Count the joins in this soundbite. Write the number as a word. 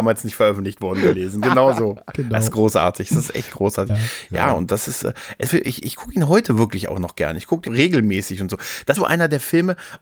three